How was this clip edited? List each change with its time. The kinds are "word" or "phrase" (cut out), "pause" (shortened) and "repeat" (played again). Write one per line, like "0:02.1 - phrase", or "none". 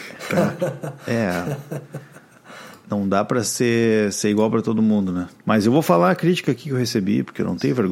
0:05.4 - pause